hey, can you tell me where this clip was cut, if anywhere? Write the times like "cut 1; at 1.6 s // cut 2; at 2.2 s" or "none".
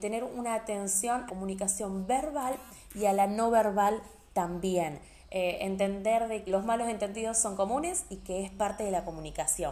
cut 1; at 1.3 s // cut 2; at 6.5 s